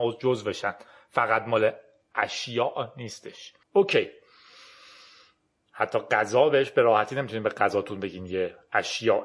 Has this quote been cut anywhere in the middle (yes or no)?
yes